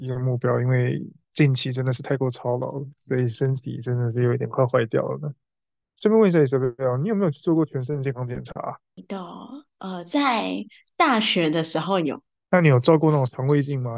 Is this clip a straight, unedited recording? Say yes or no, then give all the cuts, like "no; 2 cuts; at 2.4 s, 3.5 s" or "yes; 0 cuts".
yes; 0 cuts